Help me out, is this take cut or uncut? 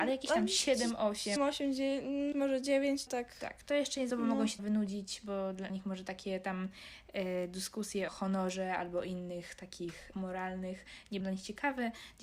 cut